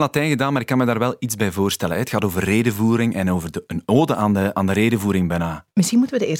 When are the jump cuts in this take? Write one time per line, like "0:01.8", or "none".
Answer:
none

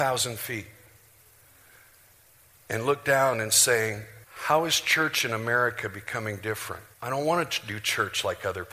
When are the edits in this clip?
0:04.2
0:06.9

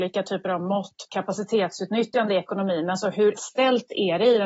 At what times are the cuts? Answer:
0:01.1
0:03.4

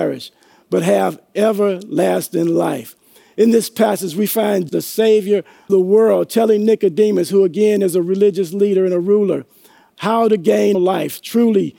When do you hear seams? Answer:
0:04.7
0:05.7
0:10.7

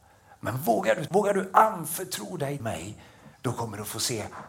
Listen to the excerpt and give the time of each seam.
0:01.1
0:02.6
0:03.3

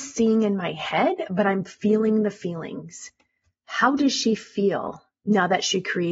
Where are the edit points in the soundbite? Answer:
none

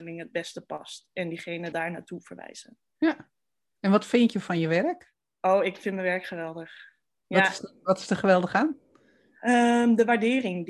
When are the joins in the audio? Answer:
0:01.7

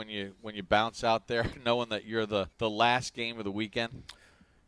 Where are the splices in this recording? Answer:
0:02.5

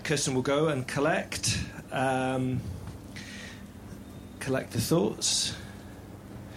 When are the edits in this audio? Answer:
none

